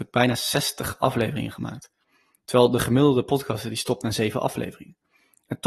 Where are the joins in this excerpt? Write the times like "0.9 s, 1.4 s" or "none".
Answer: none

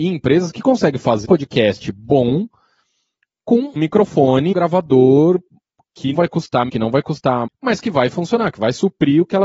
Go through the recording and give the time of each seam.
1.2 s, 3.8 s, 4.5 s, 6.1 s, 6.7 s, 7.5 s

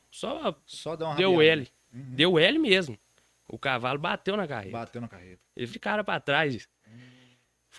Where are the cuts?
5.7 s

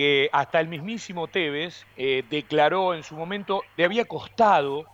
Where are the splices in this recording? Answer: 1.9 s, 3.8 s

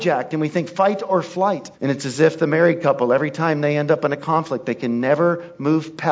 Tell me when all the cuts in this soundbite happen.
1.7 s

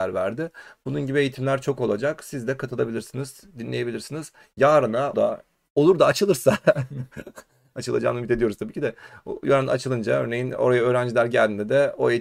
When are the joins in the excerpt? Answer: 5.1 s, 5.5 s

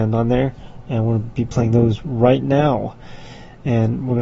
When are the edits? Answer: none

